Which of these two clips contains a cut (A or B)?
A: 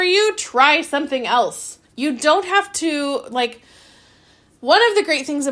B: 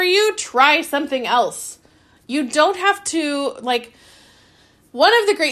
A